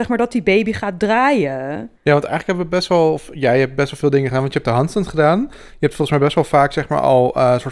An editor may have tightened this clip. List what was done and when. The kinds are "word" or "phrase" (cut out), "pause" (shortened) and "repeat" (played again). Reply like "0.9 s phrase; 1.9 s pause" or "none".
2.0 s pause